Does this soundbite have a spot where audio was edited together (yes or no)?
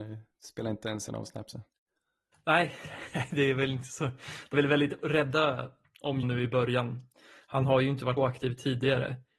yes